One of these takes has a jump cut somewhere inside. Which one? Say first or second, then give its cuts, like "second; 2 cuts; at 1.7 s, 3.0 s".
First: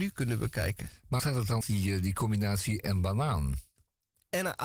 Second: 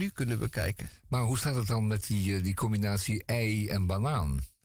first; 3 cuts; at 1.2 s, 1.6 s, 2.8 s